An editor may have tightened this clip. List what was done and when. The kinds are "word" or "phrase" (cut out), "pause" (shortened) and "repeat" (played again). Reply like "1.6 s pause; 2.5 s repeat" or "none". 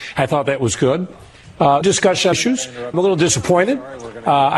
1.8 s word; 2.3 s word; 2.9 s word